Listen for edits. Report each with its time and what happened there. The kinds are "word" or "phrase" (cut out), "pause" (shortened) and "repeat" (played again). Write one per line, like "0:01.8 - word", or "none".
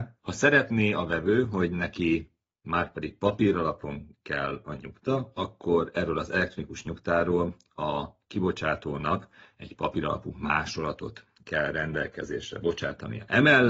none